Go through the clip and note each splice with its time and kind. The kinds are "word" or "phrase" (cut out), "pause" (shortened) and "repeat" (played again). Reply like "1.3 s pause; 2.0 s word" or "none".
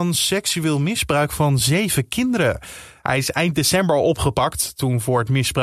none